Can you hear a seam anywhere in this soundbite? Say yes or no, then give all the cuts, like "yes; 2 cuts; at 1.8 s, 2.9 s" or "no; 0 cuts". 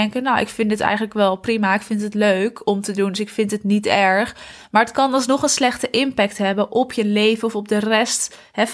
no; 0 cuts